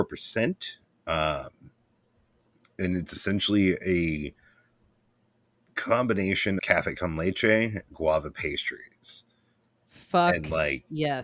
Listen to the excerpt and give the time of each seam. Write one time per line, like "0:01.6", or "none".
0:06.6
0:07.9